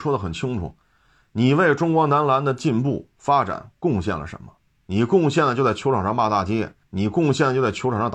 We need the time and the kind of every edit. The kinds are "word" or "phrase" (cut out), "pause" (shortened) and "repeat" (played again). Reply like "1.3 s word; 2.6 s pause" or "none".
4.7 s pause; 6.8 s pause